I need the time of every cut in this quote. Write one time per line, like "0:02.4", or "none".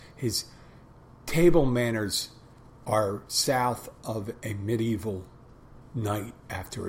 none

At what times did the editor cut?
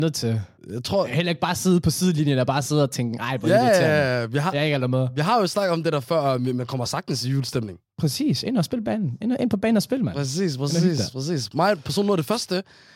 none

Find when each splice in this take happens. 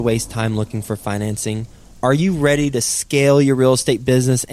none

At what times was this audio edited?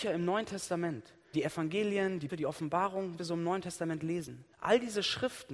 0:01.3
0:02.3
0:03.2
0:04.5

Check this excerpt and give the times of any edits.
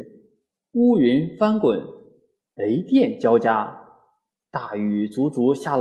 none

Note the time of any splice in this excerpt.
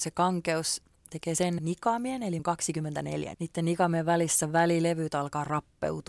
0:01.6
0:02.4
0:03.3

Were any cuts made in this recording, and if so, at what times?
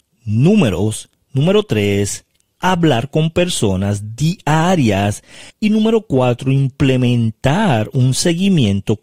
0:05.5

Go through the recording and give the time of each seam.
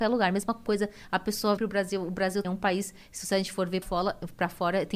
0:01.6
0:02.4
0:03.8

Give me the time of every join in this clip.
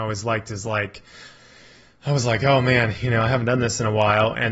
none

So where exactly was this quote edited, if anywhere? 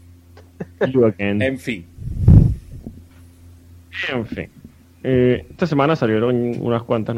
0:05.6

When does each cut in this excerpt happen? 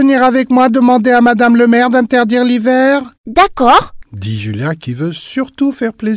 0:03.1

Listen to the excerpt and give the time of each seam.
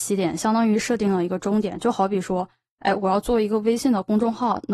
none

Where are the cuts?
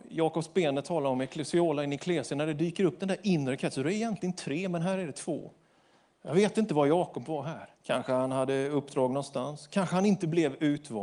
0:07.7

